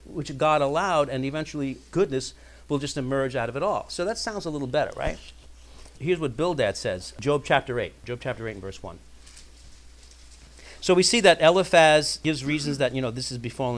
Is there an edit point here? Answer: no; 0 cuts

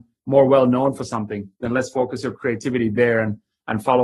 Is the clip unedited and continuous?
no; 1 cut; at 1.5 s

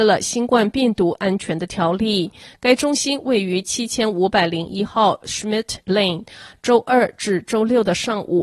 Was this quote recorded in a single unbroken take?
yes; 0 cuts

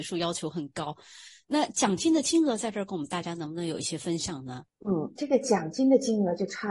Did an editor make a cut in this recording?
yes; 1 cut; at 4.7 s

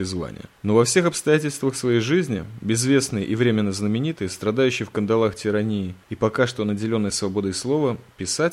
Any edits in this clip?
no; 0 cuts

